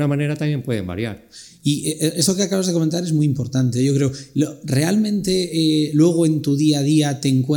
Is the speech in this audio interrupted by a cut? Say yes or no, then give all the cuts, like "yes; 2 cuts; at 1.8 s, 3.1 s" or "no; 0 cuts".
no; 0 cuts